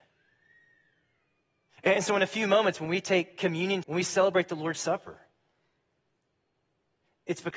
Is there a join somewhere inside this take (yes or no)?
yes